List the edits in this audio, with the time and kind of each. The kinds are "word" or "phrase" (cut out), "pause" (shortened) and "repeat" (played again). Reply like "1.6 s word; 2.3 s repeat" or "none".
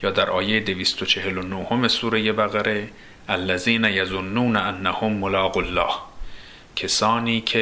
none